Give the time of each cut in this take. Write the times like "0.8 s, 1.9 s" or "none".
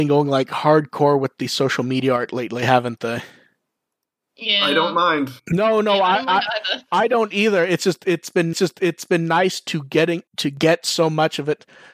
5.4 s, 8.5 s, 10.3 s